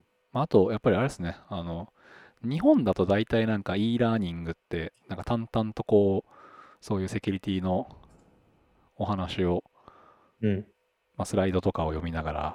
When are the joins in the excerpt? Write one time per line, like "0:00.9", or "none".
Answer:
none